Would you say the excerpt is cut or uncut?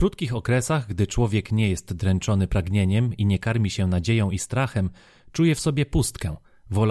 uncut